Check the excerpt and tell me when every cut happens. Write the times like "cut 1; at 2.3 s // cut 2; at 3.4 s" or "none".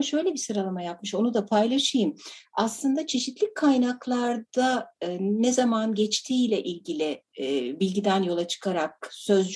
none